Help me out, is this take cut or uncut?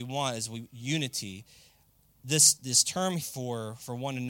cut